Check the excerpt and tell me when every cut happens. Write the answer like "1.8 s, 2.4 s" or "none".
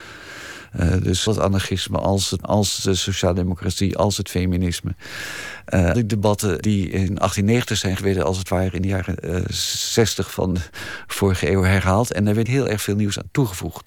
1.3 s, 2.4 s, 5.9 s, 6.6 s, 8.0 s, 12.5 s